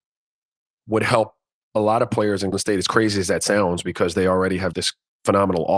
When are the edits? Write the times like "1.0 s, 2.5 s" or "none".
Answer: 2.5 s, 4.7 s